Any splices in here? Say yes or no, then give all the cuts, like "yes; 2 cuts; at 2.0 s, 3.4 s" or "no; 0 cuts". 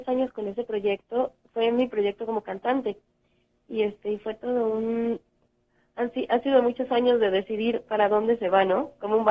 no; 0 cuts